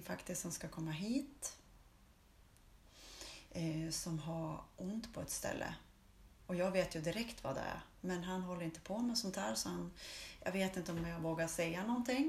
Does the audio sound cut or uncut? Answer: uncut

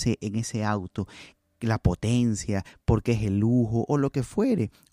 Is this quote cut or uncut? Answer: uncut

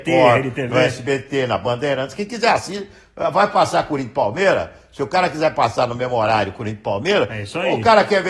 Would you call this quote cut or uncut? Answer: uncut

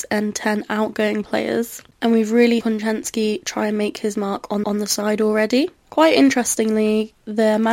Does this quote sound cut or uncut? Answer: cut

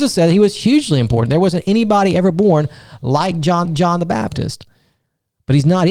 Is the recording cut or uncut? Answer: cut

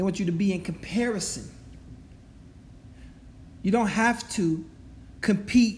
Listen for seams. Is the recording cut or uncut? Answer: uncut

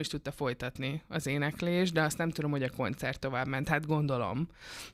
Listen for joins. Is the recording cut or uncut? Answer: uncut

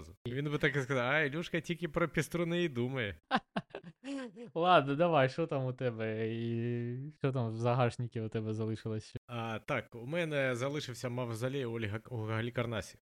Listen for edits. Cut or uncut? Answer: cut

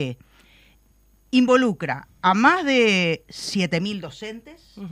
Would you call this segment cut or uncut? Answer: uncut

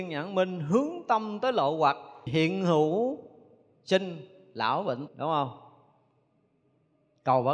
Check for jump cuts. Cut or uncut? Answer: cut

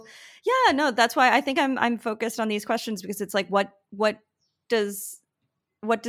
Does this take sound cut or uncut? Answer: uncut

